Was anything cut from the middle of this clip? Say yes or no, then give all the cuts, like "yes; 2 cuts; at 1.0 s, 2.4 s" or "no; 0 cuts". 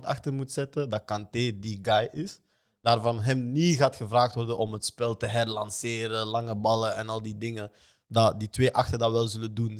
no; 0 cuts